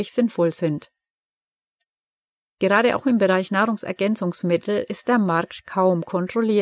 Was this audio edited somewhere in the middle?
no; 0 cuts

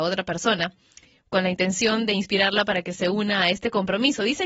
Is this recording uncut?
yes; 0 cuts

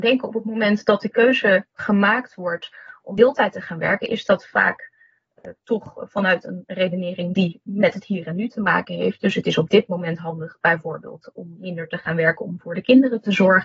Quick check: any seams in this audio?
yes; 1 cut; at 1.7 s

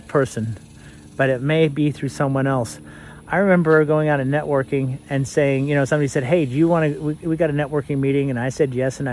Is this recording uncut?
yes; 0 cuts

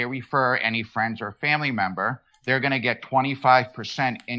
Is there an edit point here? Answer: no; 0 cuts

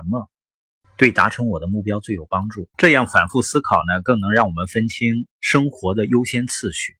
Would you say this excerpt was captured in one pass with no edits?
no; 2 cuts; at 2.7 s, 5.3 s

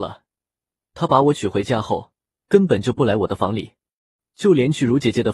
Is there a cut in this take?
no; 0 cuts

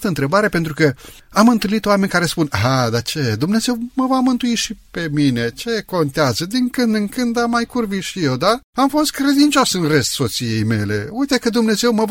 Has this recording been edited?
yes; 1 cut; at 8.7 s

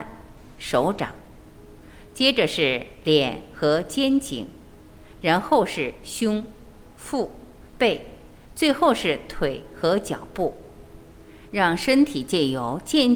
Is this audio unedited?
no; 1 cut; at 7.7 s

